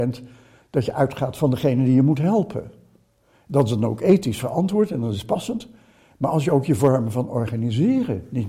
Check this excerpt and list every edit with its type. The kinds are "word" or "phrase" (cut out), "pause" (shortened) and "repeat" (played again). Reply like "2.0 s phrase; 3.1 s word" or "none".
none